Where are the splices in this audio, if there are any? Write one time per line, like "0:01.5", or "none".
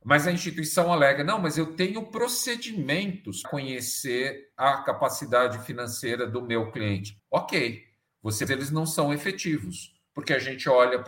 0:03.4
0:07.2
0:08.5